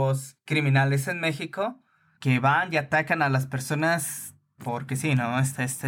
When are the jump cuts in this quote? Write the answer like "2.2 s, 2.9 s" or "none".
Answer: none